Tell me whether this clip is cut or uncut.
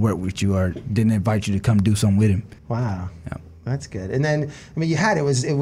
cut